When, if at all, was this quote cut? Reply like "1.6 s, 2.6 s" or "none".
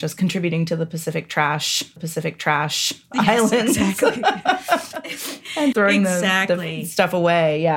2.0 s, 5.7 s